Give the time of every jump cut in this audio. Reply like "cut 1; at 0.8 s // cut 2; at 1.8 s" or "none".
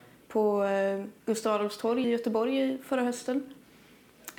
cut 1; at 1.2 s // cut 2; at 2.0 s